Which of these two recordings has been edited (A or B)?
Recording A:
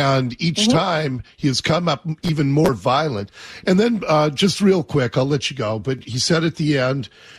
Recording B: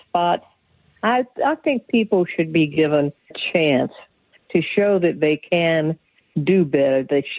B